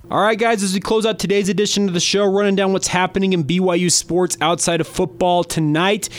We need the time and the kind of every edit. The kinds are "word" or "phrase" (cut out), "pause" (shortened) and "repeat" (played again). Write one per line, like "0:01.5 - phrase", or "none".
none